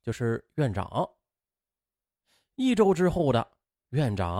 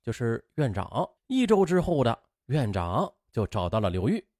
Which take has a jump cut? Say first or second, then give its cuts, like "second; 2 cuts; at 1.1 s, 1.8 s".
second; 2 cuts; at 1.2 s, 2.4 s